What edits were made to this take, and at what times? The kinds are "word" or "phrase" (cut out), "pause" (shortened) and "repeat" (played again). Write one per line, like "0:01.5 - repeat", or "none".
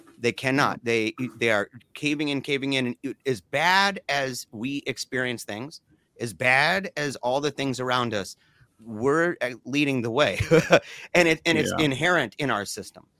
0:08.7 - word